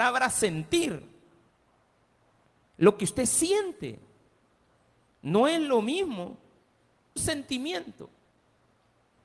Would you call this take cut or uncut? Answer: cut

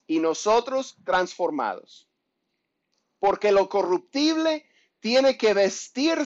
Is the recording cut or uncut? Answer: cut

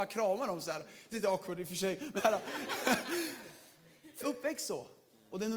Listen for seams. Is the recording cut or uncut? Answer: cut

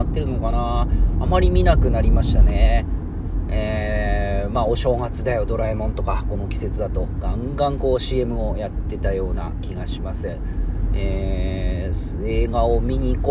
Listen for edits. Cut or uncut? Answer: uncut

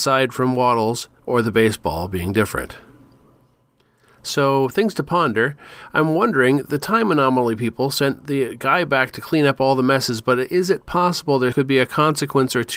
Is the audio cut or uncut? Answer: cut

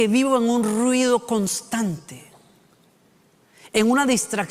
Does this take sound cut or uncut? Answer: uncut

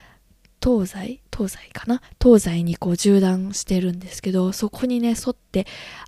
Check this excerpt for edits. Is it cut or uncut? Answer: cut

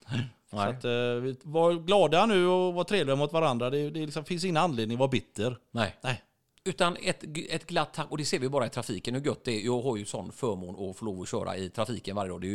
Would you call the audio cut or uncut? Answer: uncut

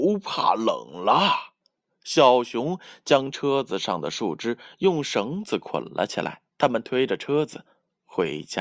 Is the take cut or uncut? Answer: cut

